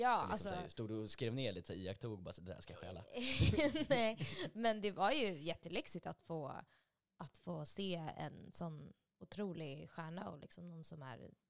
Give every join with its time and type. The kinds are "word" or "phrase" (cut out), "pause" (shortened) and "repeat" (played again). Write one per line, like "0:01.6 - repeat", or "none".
none

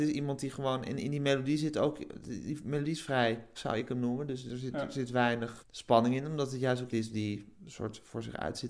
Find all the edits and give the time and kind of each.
0:03.5 - word
0:05.6 - word
0:06.9 - word

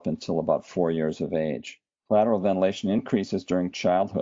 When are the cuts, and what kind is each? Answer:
none

